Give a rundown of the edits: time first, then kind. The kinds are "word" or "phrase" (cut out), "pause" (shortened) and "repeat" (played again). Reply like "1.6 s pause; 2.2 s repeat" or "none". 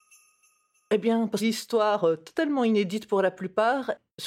1.4 s phrase